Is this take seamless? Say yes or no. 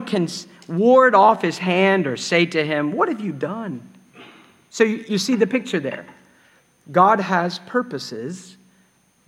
yes